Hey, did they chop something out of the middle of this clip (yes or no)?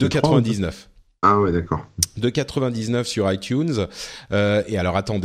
no